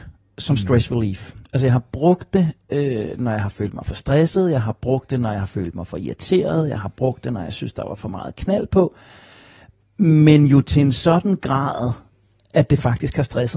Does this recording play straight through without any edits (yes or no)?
yes